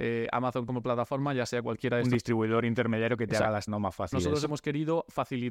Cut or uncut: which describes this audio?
cut